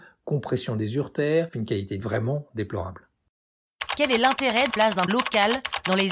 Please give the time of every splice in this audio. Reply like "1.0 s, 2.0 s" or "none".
1.5 s, 2.0 s, 4.7 s, 5.1 s